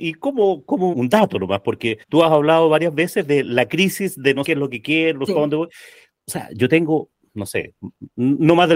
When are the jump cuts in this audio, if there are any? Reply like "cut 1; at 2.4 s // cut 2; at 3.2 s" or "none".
cut 1; at 0.9 s // cut 2; at 2.0 s // cut 3; at 4.4 s // cut 4; at 5.3 s